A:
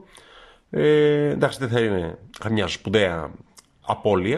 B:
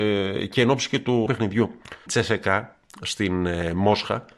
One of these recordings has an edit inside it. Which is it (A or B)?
B